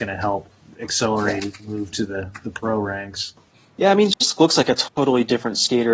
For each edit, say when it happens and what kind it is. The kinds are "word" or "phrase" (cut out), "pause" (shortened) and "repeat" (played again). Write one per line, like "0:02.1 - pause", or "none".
0:03.5 - pause